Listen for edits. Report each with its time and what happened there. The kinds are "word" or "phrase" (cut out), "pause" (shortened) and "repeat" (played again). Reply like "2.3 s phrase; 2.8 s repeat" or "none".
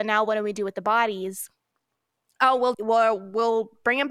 2.7 s word